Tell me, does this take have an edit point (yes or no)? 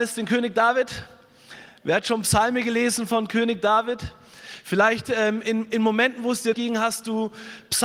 yes